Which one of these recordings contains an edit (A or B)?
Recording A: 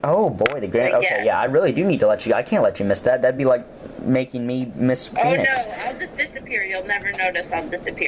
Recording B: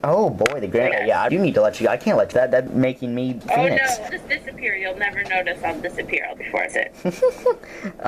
B